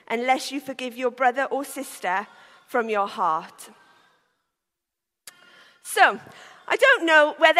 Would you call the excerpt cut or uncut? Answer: uncut